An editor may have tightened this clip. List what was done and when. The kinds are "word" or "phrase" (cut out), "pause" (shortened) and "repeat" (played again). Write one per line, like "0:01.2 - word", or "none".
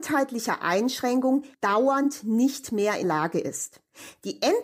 0:01.5 - pause
0:03.0 - word